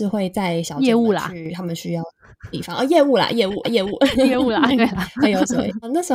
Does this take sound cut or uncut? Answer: cut